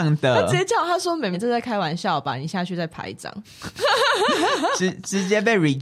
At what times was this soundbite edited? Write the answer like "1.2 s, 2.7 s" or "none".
1.3 s

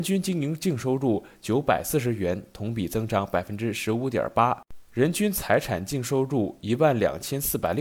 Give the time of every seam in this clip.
4.9 s

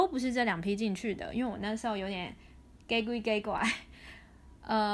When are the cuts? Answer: none

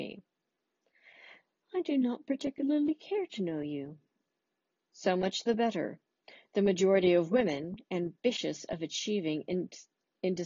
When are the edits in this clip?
none

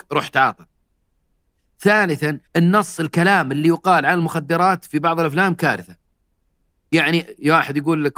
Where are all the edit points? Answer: 2.5 s

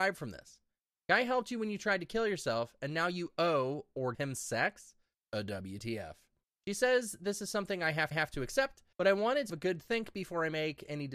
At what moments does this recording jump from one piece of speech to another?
4.1 s, 6.4 s, 8.1 s, 8.9 s, 9.5 s

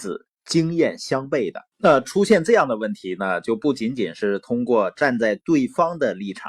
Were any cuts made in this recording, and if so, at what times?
1.7 s

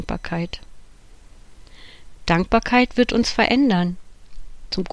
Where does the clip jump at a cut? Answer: none

